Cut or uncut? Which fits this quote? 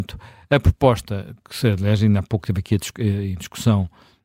uncut